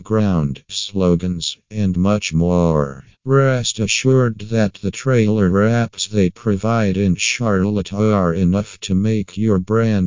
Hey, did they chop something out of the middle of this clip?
yes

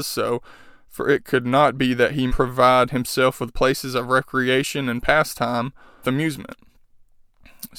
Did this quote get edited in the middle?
yes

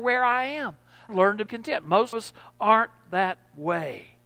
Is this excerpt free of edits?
no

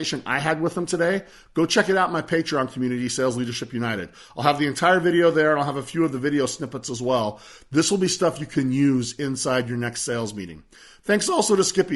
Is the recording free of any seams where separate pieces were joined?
yes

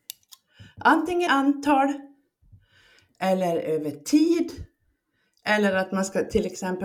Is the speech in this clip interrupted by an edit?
yes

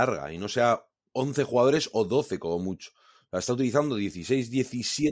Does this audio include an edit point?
no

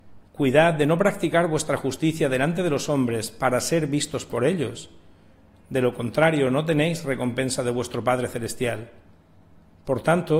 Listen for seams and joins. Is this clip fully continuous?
yes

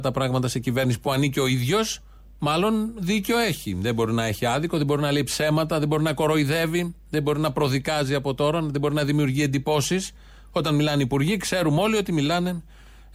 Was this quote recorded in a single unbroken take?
yes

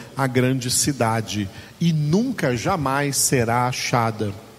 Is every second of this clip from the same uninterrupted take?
yes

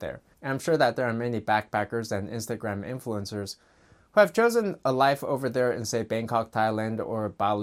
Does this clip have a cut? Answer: no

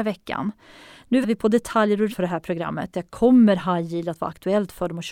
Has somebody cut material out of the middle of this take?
yes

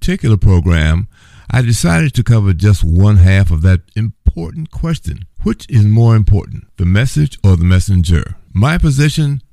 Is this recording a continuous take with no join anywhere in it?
yes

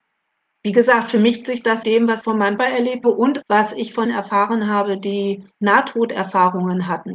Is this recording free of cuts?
no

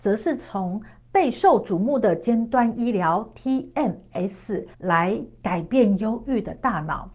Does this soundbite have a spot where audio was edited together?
yes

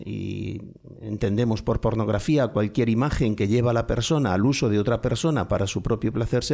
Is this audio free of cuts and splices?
yes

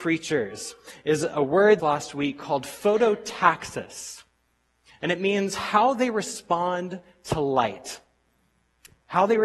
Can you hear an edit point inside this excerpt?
yes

